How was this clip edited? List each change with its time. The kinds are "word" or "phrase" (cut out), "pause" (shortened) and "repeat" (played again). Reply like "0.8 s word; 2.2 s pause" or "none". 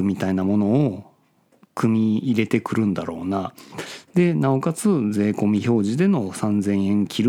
none